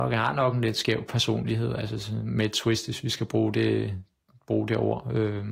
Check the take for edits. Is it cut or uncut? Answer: uncut